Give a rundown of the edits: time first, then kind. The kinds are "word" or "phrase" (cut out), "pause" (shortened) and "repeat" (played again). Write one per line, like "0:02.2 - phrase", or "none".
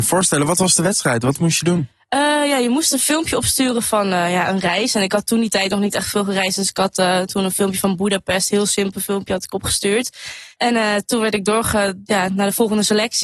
0:10.5 - pause